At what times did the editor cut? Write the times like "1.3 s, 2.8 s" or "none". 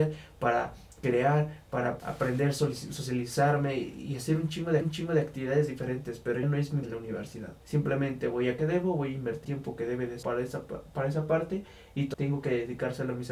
2.0 s, 4.8 s, 6.4 s, 6.8 s, 7.6 s, 8.6 s, 9.4 s, 10.2 s, 12.1 s